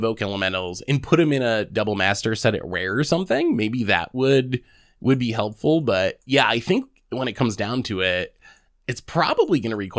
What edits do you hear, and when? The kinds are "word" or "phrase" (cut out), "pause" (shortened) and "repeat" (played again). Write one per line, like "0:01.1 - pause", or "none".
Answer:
none